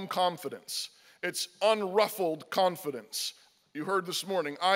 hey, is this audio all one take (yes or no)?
yes